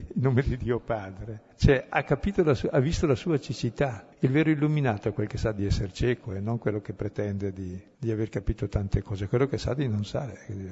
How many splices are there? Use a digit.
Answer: 3